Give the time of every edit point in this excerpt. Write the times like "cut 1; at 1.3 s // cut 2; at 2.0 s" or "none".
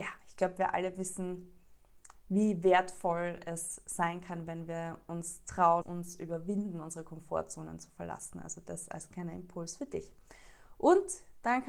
cut 1; at 5.8 s